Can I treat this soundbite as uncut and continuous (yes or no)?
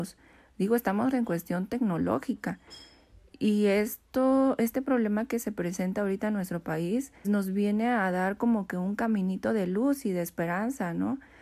no